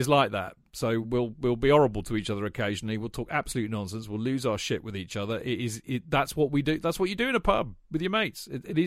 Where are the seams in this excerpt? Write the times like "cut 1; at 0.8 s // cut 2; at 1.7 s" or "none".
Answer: none